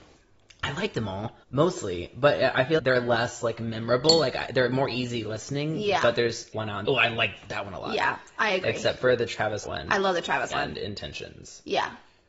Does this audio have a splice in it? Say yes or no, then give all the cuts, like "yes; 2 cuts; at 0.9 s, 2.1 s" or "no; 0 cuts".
yes; 6 cuts; at 1.4 s, 2.8 s, 6.5 s, 6.8 s, 9.6 s, 10.5 s